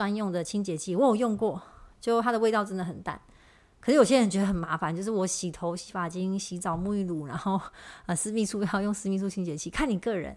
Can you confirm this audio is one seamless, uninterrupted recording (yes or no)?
yes